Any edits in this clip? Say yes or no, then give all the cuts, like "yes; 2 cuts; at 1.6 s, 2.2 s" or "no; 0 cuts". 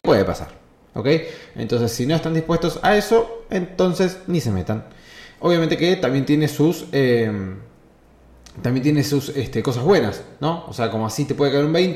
no; 0 cuts